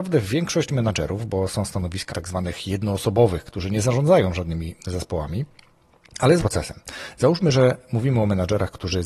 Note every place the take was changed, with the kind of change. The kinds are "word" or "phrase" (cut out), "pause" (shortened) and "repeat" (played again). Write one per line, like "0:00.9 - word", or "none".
0:02.1 - word
0:06.4 - word